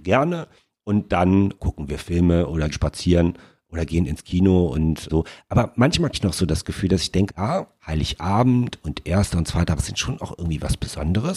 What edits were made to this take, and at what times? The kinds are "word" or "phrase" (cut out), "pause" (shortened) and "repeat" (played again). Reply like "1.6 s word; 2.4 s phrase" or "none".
1.6 s word; 2.7 s word; 5.1 s word; 6.1 s word; 7.3 s word; 9.8 s word